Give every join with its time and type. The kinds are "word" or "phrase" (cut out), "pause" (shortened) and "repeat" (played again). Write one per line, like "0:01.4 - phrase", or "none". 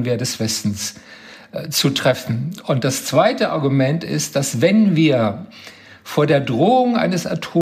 none